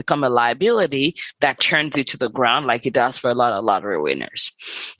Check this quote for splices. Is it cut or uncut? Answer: uncut